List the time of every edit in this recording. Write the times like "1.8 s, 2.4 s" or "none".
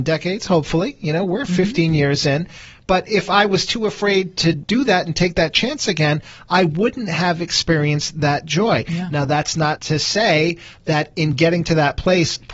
none